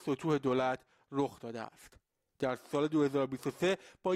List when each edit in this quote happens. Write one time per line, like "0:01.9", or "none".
none

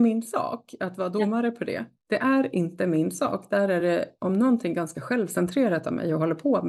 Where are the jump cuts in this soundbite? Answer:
none

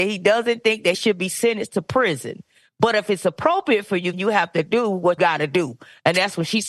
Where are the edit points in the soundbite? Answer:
0:00.9
0:04.1
0:05.2

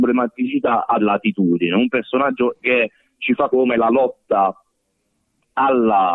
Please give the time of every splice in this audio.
0:01.0
0:02.6
0:03.5

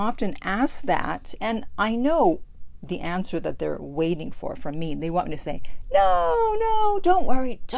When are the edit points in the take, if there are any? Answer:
none

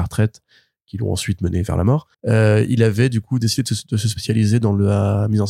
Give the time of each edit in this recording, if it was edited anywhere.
0:02.1

